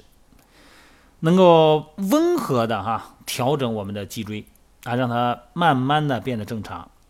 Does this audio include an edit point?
no; 0 cuts

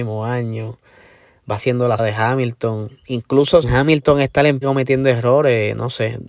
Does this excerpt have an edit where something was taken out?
yes; 4 cuts; at 1.6 s, 2.0 s, 3.6 s, 4.6 s

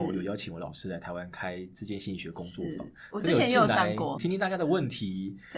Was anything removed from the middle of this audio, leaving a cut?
yes; 1 cut; at 4.2 s

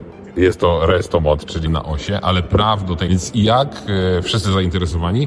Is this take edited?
yes; 2 cuts; at 1.7 s, 3.1 s

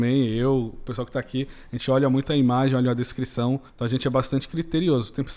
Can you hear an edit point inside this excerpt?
yes; 1 cut; at 3.7 s

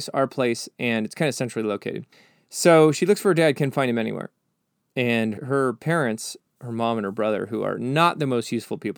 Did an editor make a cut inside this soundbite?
no; 0 cuts

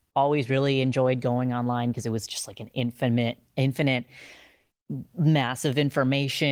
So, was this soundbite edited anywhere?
no; 0 cuts

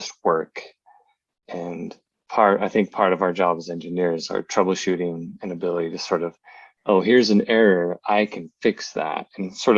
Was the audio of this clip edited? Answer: no; 0 cuts

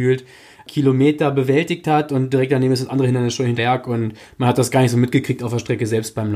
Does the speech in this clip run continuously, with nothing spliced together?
no; 1 cut; at 3.6 s

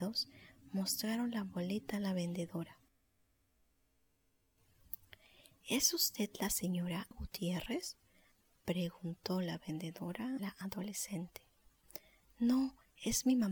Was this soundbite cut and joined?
yes; 2 cuts; at 7.1 s, 10.4 s

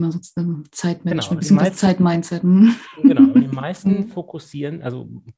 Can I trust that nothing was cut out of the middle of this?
yes; 0 cuts

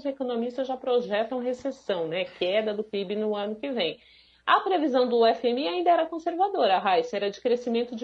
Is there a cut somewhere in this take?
no; 0 cuts

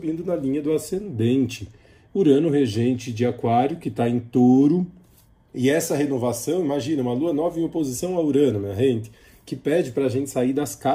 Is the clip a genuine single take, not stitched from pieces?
yes; 0 cuts

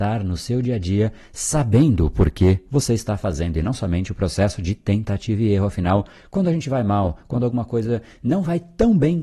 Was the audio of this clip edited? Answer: no; 0 cuts

